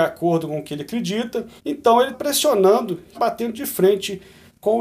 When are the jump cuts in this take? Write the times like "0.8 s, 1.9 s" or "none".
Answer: 1.6 s, 2.1 s, 3.1 s